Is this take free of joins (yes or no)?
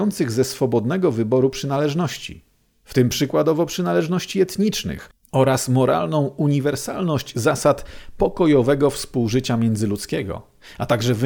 yes